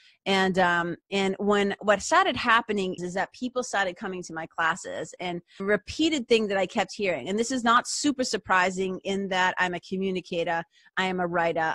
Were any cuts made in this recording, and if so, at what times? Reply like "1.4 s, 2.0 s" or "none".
1.8 s, 3.0 s, 5.6 s